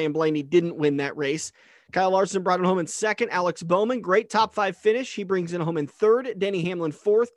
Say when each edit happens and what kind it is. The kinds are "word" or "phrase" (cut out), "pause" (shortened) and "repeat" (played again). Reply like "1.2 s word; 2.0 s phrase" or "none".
none